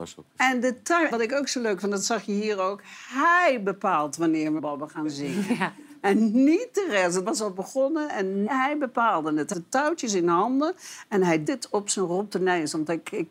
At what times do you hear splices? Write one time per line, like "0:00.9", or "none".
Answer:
0:01.1
0:04.6
0:07.3
0:08.5
0:09.5
0:11.5